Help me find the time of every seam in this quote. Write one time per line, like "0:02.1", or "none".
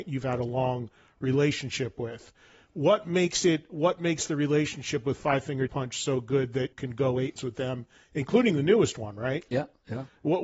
0:05.7
0:06.7
0:07.4